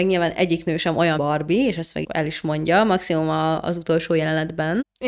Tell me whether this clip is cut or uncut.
cut